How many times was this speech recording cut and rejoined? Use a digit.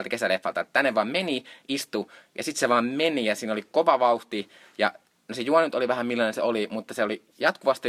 0